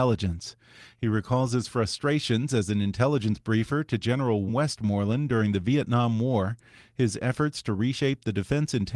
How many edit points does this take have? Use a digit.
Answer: 1